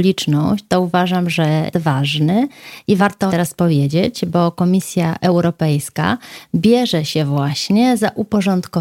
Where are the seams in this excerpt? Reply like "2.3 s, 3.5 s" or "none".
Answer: 1.7 s, 3.0 s, 3.3 s